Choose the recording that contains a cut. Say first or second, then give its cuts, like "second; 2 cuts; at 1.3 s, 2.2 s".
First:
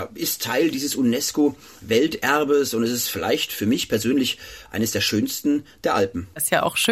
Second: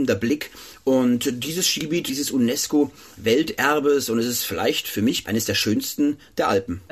second; 2 cuts; at 2.1 s, 5.2 s